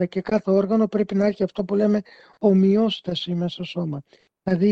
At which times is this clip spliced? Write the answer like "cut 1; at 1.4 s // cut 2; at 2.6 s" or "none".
cut 1; at 3.6 s